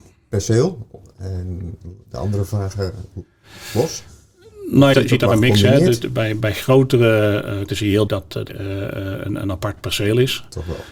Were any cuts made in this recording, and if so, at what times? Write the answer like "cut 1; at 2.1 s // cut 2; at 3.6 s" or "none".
cut 1; at 2.0 s // cut 2; at 4.9 s // cut 3; at 6.4 s // cut 4; at 7.7 s // cut 5; at 8.1 s // cut 6; at 8.5 s